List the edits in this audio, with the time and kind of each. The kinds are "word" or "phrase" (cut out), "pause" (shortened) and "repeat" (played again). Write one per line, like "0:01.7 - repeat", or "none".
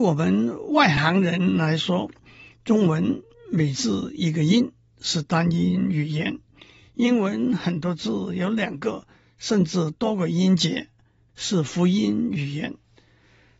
none